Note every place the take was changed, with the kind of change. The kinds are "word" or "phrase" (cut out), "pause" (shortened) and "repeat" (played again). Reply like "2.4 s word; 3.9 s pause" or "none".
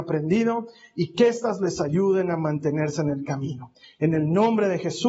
none